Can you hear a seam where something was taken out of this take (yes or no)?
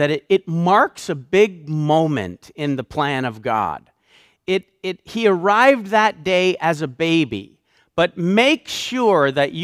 no